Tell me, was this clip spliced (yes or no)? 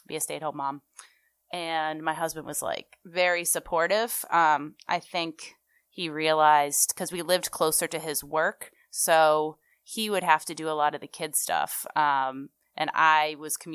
no